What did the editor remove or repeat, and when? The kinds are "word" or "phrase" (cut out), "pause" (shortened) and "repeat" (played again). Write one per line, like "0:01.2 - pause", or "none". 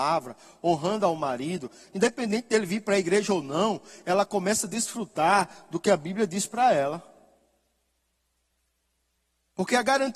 none